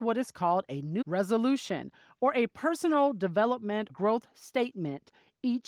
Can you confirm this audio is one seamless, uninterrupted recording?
no; 2 cuts; at 1.0 s, 3.9 s

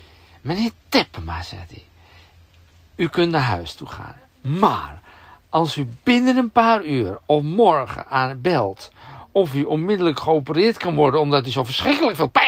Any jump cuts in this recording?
no; 0 cuts

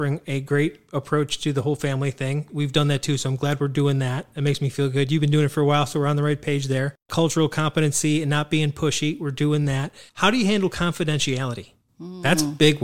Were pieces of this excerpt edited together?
yes; 1 cut; at 10.1 s

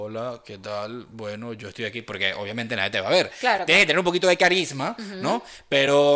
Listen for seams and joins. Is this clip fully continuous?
yes; 0 cuts

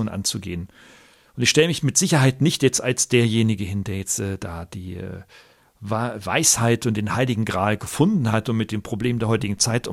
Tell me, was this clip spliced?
no; 0 cuts

